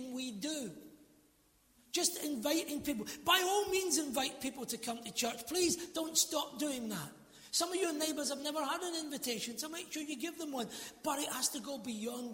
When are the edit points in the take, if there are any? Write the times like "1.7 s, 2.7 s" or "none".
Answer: none